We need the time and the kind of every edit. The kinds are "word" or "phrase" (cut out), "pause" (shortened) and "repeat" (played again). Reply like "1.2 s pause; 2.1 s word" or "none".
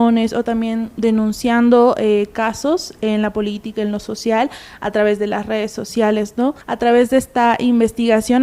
6.6 s pause